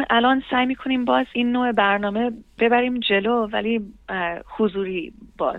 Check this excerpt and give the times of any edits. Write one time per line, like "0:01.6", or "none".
0:01.3